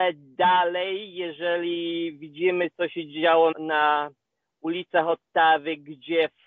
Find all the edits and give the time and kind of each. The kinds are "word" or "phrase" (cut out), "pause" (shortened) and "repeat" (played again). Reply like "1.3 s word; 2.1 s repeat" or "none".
3.5 s word

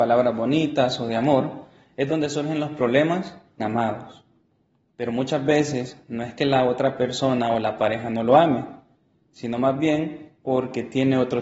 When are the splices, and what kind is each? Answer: 3.6 s phrase

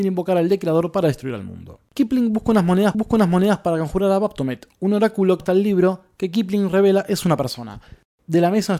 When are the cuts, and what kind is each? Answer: 2.9 s repeat; 5.4 s phrase

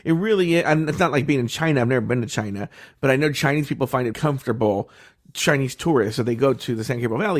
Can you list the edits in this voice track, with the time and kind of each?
4.1 s word

